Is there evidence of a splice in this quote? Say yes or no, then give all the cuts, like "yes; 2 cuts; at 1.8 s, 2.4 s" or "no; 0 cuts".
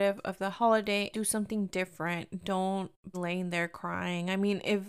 yes; 2 cuts; at 1.1 s, 3.1 s